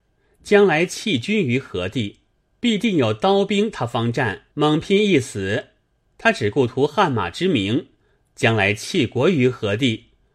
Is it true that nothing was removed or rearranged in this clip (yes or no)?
no